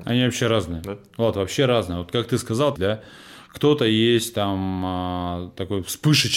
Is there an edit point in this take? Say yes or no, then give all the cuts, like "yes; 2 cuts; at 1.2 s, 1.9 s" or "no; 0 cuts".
yes; 1 cut; at 2.8 s